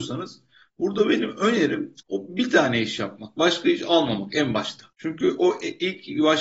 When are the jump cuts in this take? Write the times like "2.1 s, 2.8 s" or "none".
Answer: 2.0 s, 4.9 s